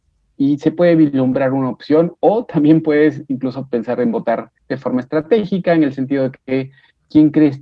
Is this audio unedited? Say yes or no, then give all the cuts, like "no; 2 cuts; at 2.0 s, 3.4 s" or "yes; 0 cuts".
no; 1 cut; at 4.6 s